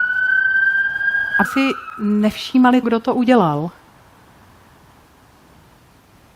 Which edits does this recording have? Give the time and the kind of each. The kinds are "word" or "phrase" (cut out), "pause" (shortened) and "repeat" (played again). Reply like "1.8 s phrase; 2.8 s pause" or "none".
1.4 s word; 2.8 s word